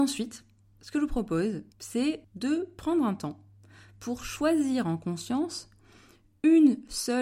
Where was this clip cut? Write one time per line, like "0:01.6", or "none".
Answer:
0:01.7